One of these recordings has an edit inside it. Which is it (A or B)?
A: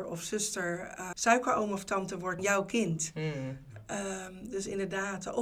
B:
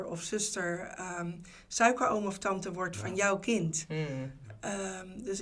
A